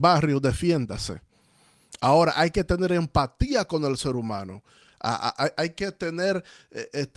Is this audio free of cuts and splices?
yes; 0 cuts

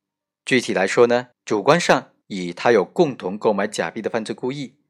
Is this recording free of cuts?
no; 2 cuts; at 1.3 s, 2.2 s

